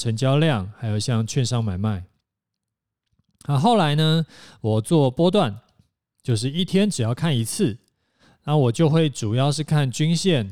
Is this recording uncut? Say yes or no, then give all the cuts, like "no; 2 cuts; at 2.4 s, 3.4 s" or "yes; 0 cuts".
yes; 0 cuts